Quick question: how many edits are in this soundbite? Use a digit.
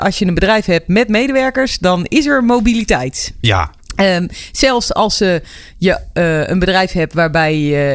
0